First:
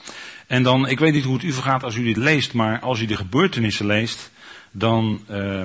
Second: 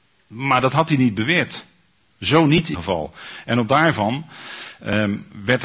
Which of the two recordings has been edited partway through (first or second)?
second